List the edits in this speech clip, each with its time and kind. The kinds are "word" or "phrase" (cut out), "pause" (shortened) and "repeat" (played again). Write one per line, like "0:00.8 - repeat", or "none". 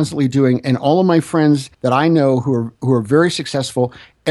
0:01.7 - pause